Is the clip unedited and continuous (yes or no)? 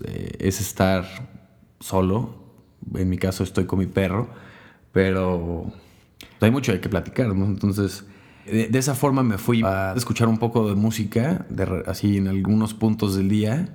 no